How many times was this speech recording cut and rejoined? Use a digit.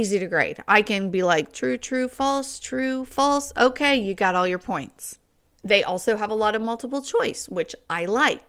1